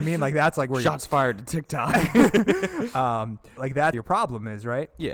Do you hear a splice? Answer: yes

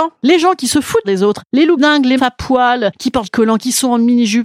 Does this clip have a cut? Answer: yes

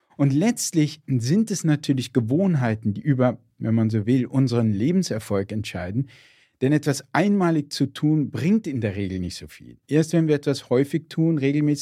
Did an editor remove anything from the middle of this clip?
no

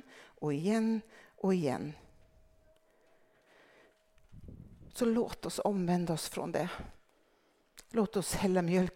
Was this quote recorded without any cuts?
yes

